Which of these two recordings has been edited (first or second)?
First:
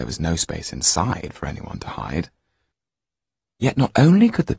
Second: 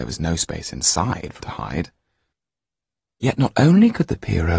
second